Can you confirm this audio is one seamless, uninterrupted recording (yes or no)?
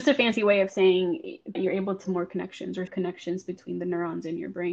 no